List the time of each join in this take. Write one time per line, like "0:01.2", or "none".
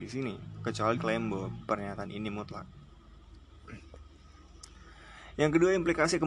0:01.0